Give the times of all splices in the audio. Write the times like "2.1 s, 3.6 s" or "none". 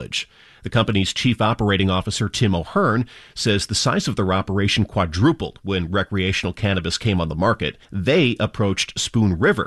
7.8 s